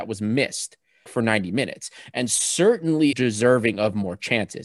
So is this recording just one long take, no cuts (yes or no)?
no